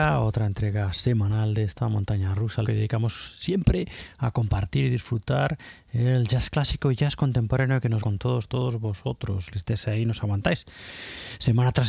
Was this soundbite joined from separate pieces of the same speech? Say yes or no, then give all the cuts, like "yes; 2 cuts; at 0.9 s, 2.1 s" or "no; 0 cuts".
yes; 3 cuts; at 2.6 s, 8.0 s, 9.5 s